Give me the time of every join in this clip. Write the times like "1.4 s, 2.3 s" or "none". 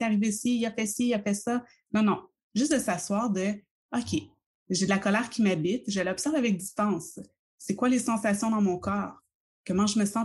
none